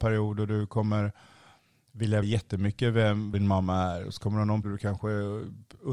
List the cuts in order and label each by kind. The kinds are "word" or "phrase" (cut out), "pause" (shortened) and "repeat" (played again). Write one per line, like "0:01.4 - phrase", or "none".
0:02.2 - word
0:03.3 - word
0:04.6 - word